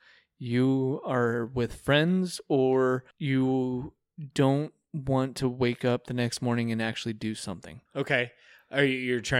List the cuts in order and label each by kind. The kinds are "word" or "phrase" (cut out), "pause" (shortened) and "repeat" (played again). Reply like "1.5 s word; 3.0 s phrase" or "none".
3.1 s pause; 7.9 s pause